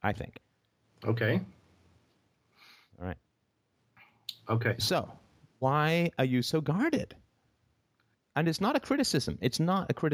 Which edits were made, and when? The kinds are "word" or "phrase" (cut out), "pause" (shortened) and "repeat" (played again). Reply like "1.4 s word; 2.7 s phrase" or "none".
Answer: none

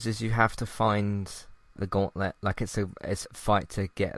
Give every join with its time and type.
1.8 s word; 3.2 s word

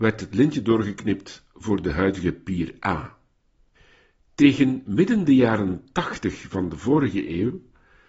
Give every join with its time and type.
none

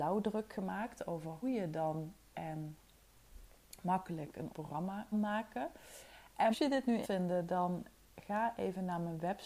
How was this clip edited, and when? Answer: 1.4 s word; 2.3 s word; 4.5 s word; 5.1 s word; 6.5 s word; 7.0 s word

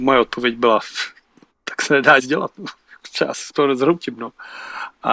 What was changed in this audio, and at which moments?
2.2 s word

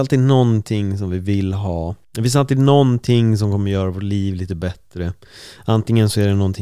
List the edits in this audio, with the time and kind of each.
2.0 s pause

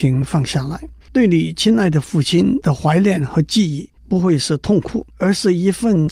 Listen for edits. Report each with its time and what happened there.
1.0 s pause; 4.0 s pause; 5.1 s pause

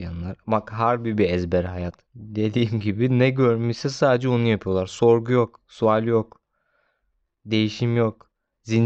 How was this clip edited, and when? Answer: 2.1 s pause

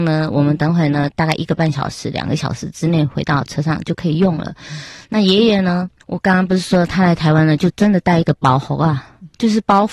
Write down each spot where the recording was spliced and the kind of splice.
6.0 s pause

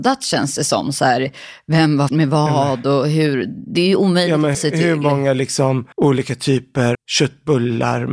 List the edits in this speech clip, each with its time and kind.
2.1 s word; 4.5 s word; 5.9 s pause; 6.9 s word

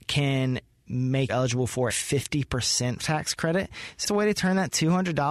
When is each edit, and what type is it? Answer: 1.3 s word; 1.9 s word; 3.0 s word; 4.0 s word

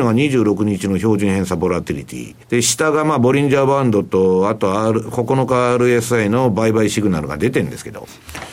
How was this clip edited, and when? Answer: 2.4 s pause

